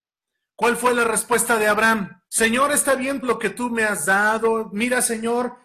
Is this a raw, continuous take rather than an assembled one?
no; 2 cuts; at 2.3 s, 3.2 s

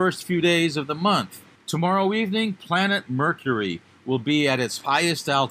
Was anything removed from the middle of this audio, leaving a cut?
yes; 1 cut; at 1.5 s

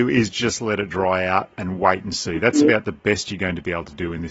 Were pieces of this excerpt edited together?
no; 0 cuts

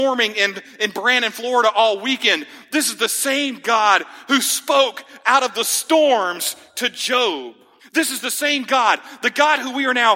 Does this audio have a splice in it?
yes; 1 cut; at 7.8 s

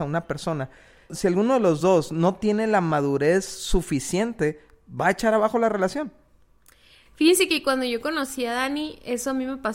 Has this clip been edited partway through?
no; 0 cuts

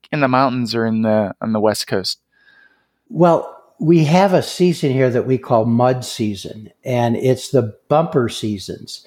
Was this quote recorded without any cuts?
yes; 0 cuts

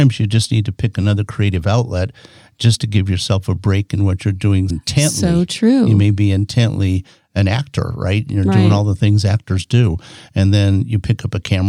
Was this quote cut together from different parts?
yes; 1 cut; at 4.7 s

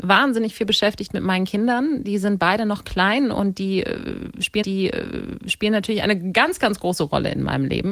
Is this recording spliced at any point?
yes; 1 cut; at 4.6 s

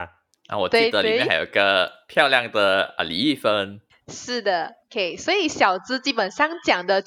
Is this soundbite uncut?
yes; 0 cuts

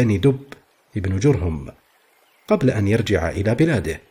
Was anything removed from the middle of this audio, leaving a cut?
no; 0 cuts

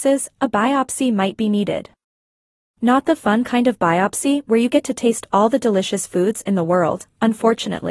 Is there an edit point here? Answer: no; 0 cuts

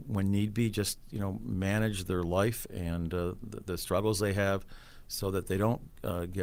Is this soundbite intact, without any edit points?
yes; 0 cuts

